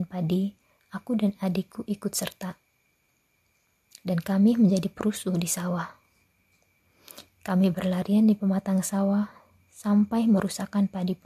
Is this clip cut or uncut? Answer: uncut